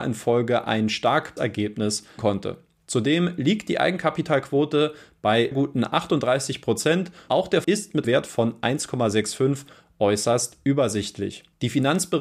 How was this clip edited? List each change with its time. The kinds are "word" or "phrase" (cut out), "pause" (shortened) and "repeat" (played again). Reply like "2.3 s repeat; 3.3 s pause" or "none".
1.4 s word; 2.2 s word; 5.5 s word; 7.3 s word; 7.6 s word; 8.0 s word